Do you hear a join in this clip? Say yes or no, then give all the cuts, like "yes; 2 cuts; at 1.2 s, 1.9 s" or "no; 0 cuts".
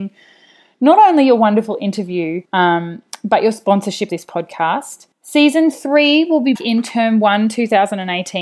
yes; 4 cuts; at 2.5 s, 4.1 s, 5.1 s, 6.6 s